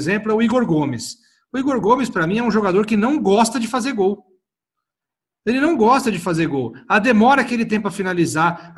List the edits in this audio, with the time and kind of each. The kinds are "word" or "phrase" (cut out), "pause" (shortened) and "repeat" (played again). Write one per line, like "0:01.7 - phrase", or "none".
none